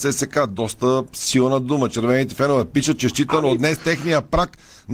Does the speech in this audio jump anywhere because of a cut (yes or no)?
no